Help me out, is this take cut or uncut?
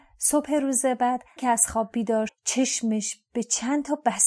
cut